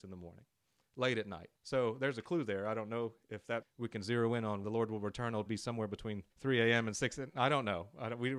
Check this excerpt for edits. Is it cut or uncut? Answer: cut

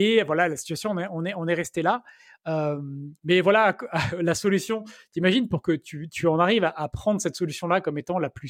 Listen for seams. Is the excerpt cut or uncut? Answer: uncut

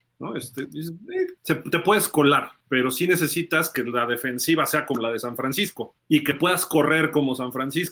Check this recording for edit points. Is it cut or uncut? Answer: cut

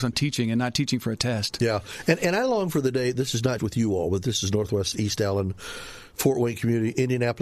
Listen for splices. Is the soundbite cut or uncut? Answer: cut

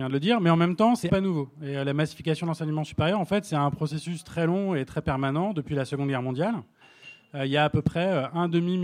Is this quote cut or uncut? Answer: cut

